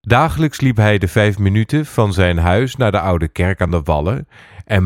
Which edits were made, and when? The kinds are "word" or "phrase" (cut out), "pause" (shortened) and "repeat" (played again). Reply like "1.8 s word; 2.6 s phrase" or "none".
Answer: none